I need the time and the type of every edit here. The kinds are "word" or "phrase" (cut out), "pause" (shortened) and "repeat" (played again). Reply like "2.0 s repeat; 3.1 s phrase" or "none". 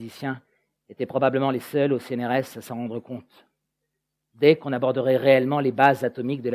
none